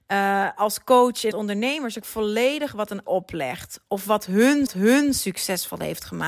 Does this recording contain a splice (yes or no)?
yes